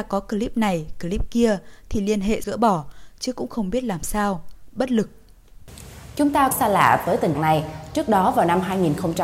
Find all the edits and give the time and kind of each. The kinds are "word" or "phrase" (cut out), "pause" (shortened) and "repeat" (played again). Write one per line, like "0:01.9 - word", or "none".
0:02.4 - word
0:06.5 - phrase
0:07.3 - word